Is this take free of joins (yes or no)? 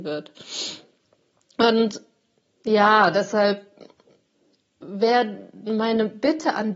yes